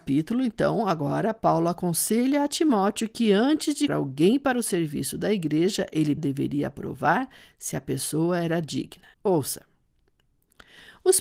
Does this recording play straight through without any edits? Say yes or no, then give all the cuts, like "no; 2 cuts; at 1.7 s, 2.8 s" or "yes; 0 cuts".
no; 3 cuts; at 3.9 s, 6.2 s, 9.1 s